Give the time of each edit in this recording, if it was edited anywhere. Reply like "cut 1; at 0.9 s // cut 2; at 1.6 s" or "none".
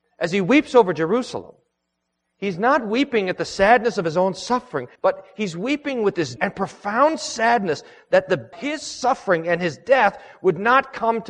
cut 1; at 5.0 s // cut 2; at 6.4 s // cut 3; at 8.5 s